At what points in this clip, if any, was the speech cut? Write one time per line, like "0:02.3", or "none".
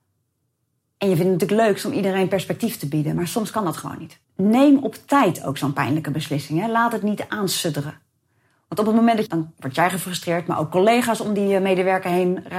0:04.2
0:09.3

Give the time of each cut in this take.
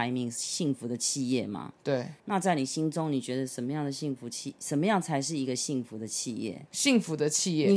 0:02.2
0:06.7

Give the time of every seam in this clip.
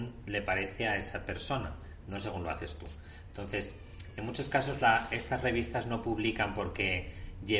none

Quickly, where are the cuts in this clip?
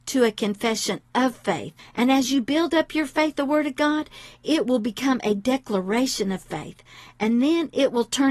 0:01.8
0:03.3

